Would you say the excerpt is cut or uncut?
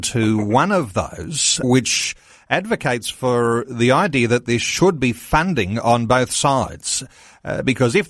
cut